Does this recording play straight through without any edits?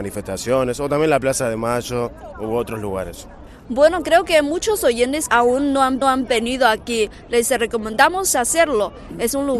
no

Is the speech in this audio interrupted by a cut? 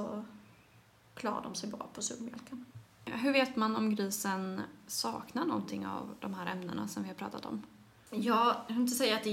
no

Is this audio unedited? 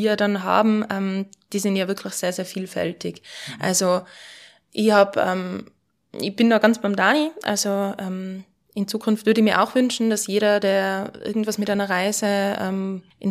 yes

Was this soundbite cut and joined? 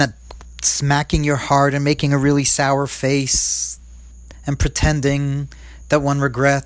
no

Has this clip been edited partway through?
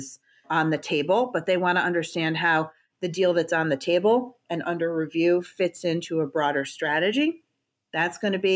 no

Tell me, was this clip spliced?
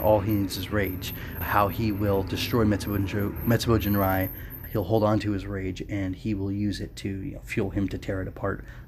yes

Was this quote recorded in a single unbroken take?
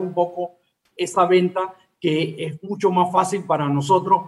no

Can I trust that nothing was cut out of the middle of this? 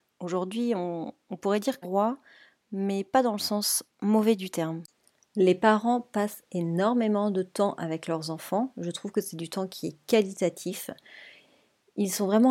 no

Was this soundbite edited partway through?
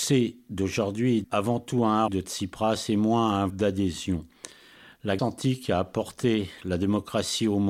yes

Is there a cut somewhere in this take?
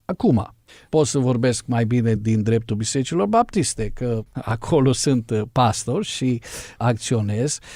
no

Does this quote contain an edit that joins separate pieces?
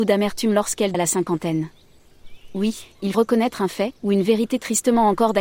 yes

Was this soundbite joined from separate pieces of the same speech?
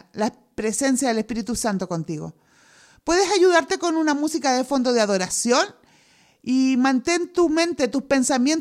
no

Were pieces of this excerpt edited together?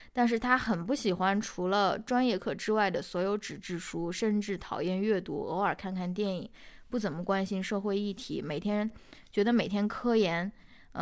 no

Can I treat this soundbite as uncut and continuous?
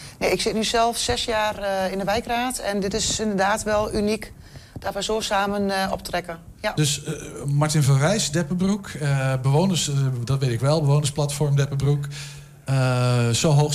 yes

